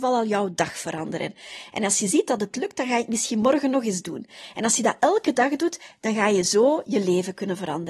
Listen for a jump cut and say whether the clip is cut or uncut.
uncut